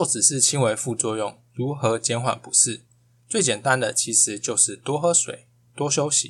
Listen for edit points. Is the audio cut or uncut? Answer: uncut